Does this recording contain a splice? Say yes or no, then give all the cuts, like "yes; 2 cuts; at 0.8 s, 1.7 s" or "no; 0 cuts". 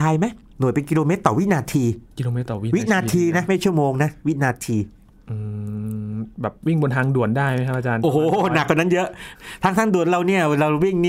no; 0 cuts